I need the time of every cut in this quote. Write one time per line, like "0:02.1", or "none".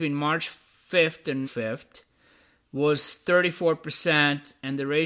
0:01.4

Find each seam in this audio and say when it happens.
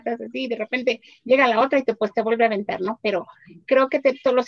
none

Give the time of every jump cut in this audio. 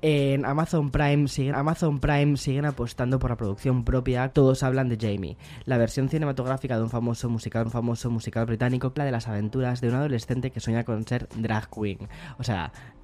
0:01.5
0:04.3
0:07.7
0:09.0

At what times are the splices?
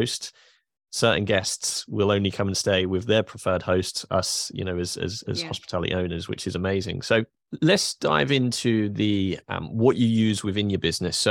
none

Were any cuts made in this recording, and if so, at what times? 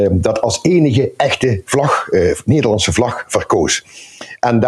none

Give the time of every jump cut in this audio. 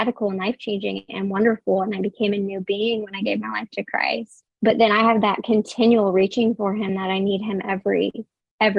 0:04.5

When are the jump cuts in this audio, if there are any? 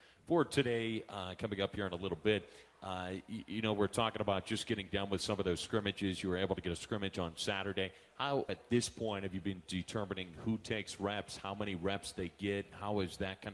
0:08.5

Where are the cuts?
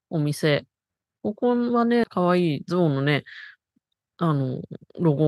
0:01.0

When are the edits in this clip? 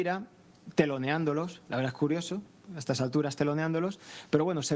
none

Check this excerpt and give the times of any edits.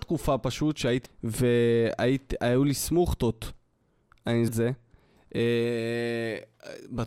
0:01.1
0:04.5

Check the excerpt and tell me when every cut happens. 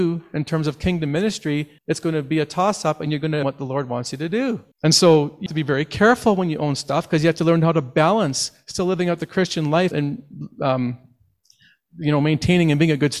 0:01.8
0:03.4
0:04.7
0:05.5
0:09.9

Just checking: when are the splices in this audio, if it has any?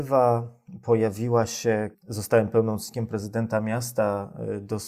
0:01.9

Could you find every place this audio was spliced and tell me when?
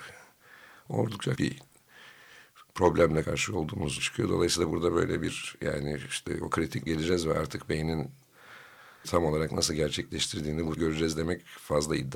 0:01.4
0:03.2
0:04.0
0:06.9
0:09.0
0:10.8

